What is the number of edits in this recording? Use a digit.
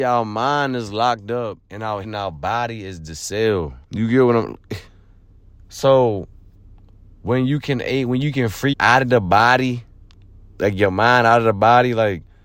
5